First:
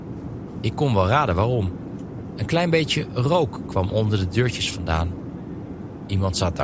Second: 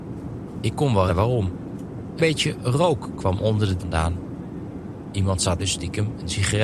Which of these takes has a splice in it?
second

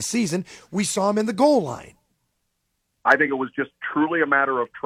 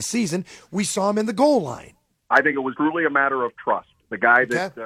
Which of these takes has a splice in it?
second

